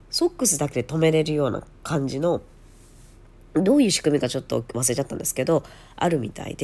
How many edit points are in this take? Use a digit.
0